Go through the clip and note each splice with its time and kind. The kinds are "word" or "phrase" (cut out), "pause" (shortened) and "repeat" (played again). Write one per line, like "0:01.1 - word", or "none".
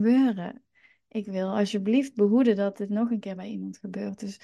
none

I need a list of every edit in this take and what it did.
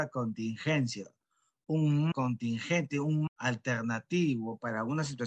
0:02.1 - word
0:03.3 - word

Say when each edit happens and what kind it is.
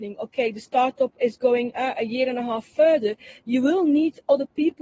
none

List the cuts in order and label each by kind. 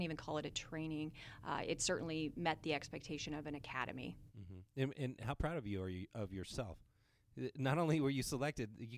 0:04.7 - pause

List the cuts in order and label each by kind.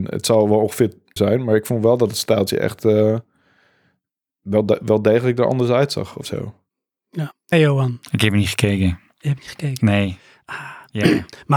0:01.2 - word
0:07.5 - word

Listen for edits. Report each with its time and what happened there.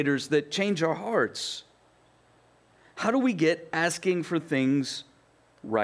none

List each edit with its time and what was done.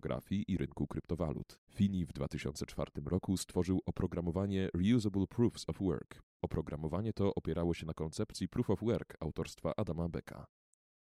0:01.7 - pause
0:06.3 - pause

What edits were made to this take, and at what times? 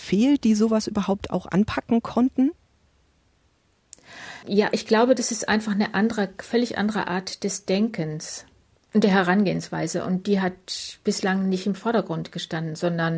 none

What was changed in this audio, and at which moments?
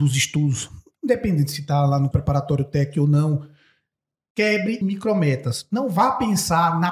0:02.1 - word
0:04.8 - word

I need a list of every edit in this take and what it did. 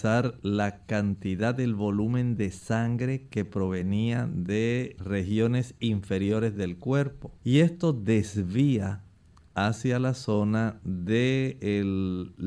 0:05.0 - word
0:07.4 - pause

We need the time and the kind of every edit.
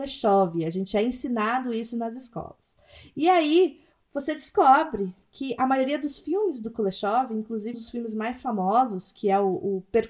0:07.7 - word

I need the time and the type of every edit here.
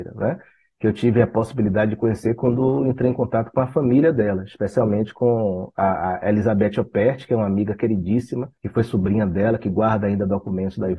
0:08.6 - pause

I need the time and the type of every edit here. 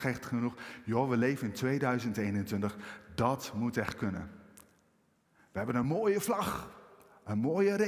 none

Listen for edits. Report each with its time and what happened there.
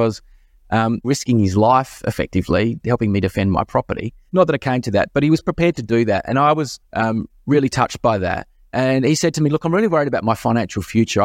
0:01.0 - phrase
0:06.8 - pause

